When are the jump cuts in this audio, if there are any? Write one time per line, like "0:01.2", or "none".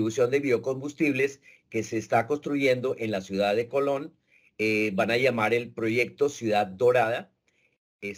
none